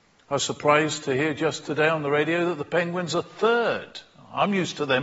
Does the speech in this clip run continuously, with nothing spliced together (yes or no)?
yes